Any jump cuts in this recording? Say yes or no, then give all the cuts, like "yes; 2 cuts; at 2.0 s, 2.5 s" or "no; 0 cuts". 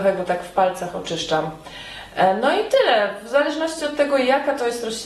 no; 0 cuts